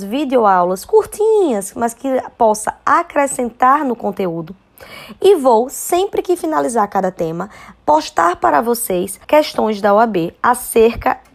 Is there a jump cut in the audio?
yes; 1 cut; at 9.2 s

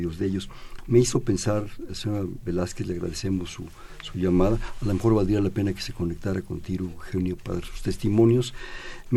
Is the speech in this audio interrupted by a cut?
yes; 2 cuts; at 1.9 s, 7.4 s

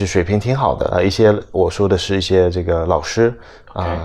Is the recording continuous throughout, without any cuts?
no; 1 cut; at 0.9 s

